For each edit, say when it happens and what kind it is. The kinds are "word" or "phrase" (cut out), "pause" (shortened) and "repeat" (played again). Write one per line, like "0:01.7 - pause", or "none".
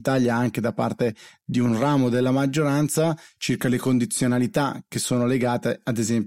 none